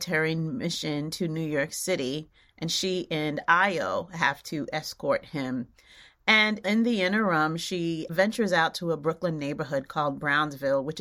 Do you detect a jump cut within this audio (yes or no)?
no